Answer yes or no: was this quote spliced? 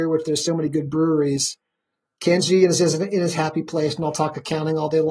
no